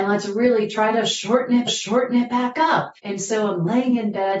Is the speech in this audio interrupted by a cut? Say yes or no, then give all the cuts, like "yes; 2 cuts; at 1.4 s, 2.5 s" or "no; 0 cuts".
yes; 2 cuts; at 1.7 s, 3.0 s